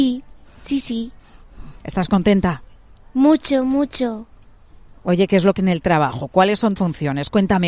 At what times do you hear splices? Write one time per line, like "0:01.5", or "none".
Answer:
0:05.6
0:06.8